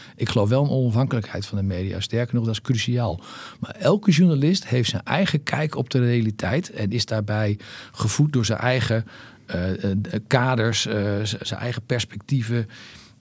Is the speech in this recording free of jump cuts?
no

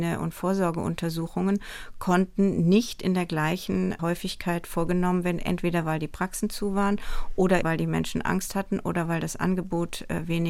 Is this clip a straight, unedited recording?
no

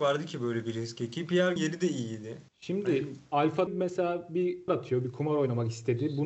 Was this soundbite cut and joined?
yes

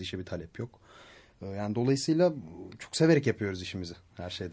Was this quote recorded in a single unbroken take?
yes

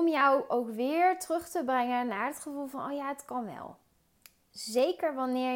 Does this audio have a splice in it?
no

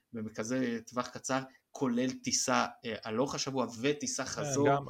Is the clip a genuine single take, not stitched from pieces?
yes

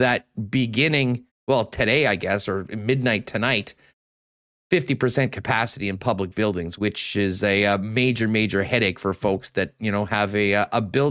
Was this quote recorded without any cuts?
no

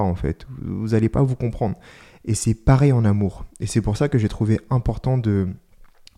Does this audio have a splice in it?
no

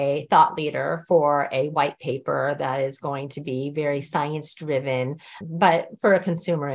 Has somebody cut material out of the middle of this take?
yes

